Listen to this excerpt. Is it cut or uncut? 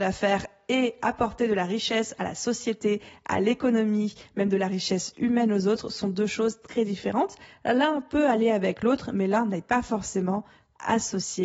uncut